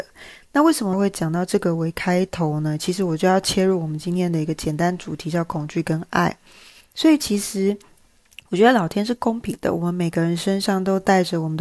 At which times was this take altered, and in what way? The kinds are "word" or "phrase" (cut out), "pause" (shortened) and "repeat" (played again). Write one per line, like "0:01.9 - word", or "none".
0:00.9 - word